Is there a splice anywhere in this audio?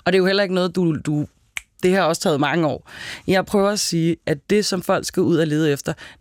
no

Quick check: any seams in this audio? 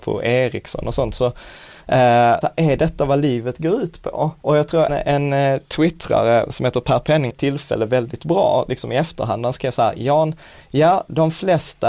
yes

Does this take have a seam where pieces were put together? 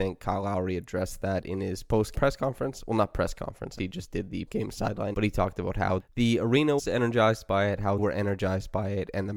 yes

